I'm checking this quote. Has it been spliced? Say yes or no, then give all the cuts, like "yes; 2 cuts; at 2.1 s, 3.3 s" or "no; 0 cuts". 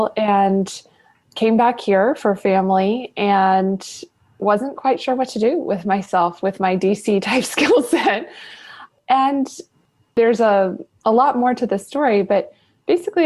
no; 0 cuts